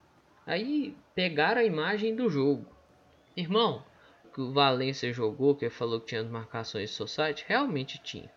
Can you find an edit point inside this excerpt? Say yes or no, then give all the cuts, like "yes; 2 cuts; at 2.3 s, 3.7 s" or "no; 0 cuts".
yes; 1 cut; at 4.2 s